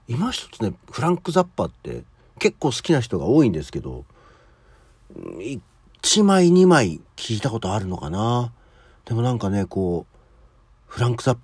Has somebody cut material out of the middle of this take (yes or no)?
no